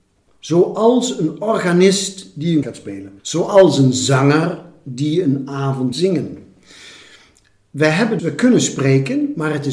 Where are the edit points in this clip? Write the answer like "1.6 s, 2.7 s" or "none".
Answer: 2.6 s, 3.2 s, 5.9 s, 8.2 s